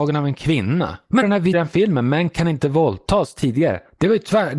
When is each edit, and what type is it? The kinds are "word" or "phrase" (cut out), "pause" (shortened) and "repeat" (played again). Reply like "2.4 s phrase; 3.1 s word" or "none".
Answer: 1.2 s word; 1.5 s phrase